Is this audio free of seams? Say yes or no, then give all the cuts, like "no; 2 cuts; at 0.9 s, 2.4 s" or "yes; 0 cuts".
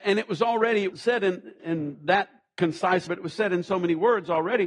no; 3 cuts; at 0.9 s, 1.6 s, 3.1 s